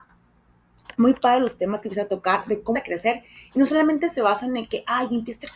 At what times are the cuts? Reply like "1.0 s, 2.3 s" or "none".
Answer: 2.7 s